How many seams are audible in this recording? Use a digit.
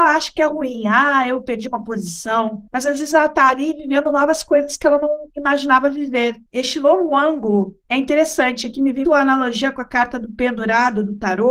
4